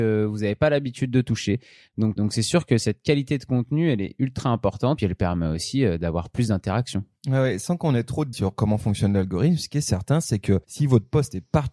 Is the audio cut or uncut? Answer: cut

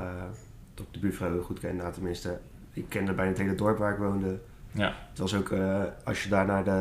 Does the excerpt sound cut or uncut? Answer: uncut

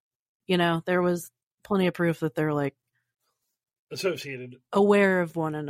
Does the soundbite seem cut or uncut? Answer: uncut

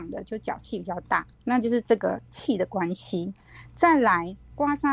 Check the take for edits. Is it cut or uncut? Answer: cut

